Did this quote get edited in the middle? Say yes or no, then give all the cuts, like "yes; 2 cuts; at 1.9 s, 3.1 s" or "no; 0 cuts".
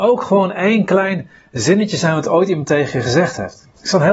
no; 0 cuts